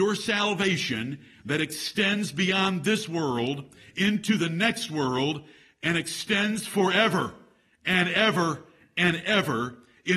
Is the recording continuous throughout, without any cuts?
yes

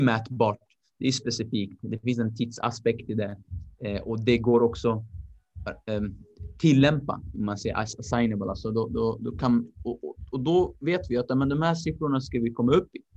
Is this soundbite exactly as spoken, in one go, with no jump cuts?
yes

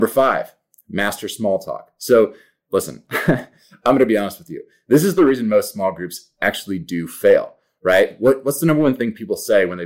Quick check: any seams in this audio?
no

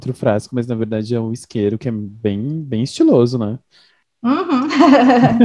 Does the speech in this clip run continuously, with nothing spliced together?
yes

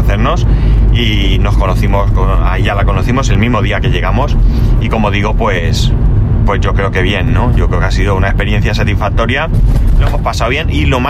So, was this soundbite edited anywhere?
no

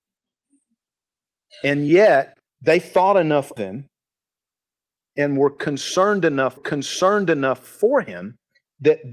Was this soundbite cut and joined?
yes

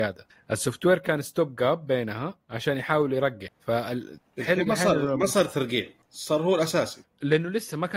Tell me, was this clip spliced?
yes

